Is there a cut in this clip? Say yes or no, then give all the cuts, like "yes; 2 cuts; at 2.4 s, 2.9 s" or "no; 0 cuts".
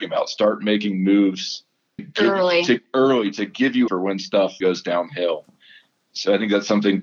yes; 3 cuts; at 2.0 s, 3.9 s, 4.6 s